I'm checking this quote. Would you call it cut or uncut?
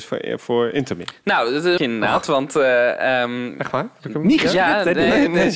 cut